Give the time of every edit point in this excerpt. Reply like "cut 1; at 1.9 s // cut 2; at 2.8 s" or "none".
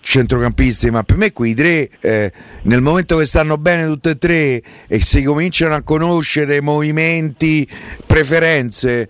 cut 1; at 1.9 s